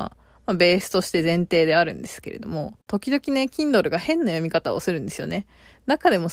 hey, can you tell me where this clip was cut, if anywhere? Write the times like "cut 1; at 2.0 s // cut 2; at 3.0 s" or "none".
cut 1; at 2.8 s